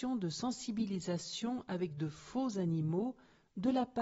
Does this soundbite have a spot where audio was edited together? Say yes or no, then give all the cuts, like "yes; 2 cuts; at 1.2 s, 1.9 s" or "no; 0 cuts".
no; 0 cuts